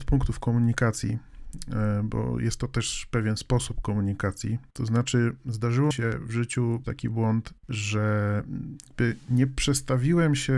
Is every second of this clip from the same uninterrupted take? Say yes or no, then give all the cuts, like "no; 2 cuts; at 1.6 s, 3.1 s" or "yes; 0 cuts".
no; 3 cuts; at 5.9 s, 6.8 s, 7.6 s